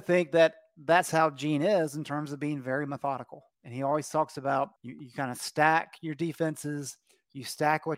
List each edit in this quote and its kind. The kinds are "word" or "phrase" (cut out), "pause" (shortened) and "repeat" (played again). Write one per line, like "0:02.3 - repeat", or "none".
0:03.5 - pause
0:04.8 - pause